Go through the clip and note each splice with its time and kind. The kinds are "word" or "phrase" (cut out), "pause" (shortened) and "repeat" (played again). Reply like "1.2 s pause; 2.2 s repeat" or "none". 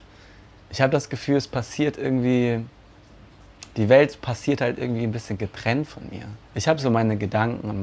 6.4 s pause